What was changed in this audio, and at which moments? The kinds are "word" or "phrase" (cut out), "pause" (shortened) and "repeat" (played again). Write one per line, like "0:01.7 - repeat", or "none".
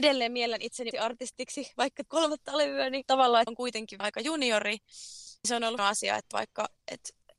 0:00.9 - word
0:02.1 - word
0:03.0 - word
0:03.5 - word
0:04.0 - word
0:05.4 - word
0:05.8 - word
0:06.3 - word